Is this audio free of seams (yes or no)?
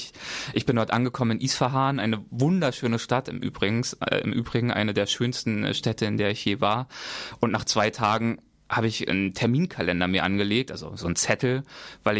yes